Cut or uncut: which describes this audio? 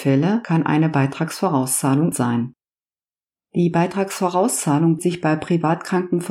cut